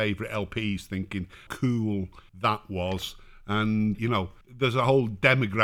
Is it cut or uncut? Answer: cut